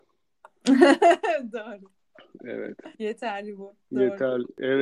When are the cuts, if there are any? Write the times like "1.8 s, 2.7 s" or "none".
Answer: 2.9 s